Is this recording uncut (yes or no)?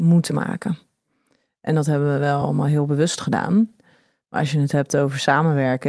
yes